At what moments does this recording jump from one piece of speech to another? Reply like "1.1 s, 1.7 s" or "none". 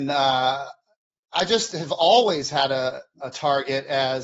none